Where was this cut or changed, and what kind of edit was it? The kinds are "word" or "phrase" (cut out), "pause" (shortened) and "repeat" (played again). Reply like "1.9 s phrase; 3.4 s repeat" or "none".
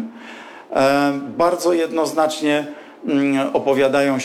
none